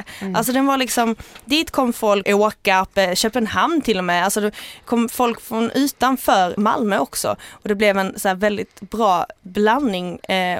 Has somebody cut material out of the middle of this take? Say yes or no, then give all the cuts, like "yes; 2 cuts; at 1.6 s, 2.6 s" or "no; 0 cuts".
yes; 2 cuts; at 2.2 s, 6.6 s